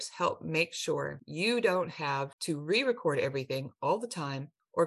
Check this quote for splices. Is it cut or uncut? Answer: uncut